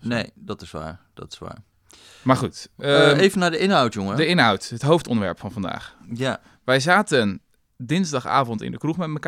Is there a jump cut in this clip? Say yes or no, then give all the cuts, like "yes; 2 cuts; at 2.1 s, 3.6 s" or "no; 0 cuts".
no; 0 cuts